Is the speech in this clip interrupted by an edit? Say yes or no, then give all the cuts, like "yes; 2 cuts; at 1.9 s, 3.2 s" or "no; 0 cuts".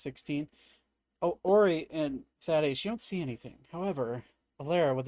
yes; 2 cuts; at 1.0 s, 2.3 s